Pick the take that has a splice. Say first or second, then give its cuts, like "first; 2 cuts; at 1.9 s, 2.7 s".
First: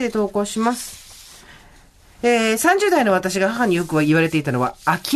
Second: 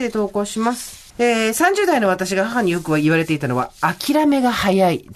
second; 1 cut; at 1.1 s